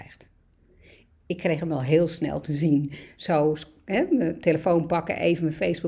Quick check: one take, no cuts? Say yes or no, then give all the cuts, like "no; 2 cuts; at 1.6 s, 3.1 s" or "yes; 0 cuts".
yes; 0 cuts